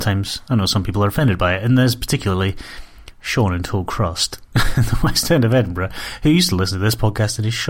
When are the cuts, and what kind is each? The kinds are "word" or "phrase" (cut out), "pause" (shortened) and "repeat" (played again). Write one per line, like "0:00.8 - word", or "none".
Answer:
none